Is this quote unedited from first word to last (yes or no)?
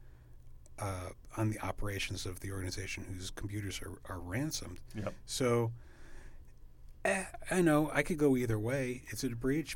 yes